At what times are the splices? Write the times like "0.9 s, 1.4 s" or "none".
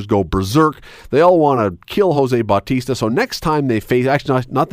none

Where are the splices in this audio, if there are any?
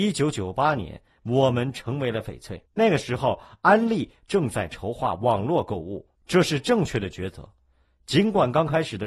2.7 s, 6.2 s

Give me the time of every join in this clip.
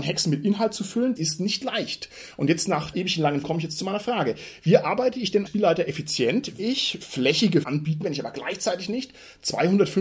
1.2 s, 2.9 s, 3.4 s, 5.5 s, 6.6 s, 7.6 s, 8.0 s

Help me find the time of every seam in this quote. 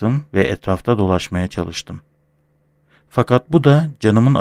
none

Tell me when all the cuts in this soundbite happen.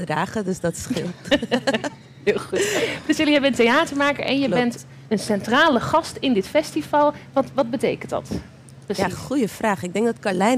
5.0 s

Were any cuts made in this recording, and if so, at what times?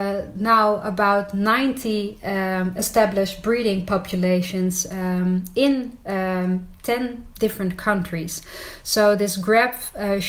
none

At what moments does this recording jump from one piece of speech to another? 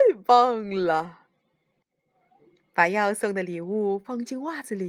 none

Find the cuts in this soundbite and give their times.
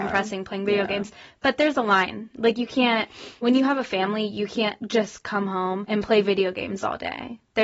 none

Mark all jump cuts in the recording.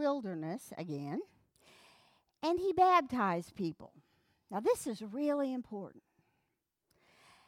none

